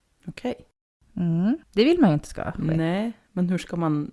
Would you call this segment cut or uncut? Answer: cut